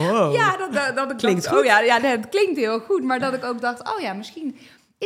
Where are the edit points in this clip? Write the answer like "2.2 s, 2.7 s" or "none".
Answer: none

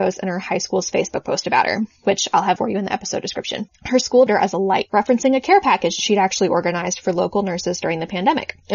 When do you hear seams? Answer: 2.6 s, 4.3 s, 6.0 s

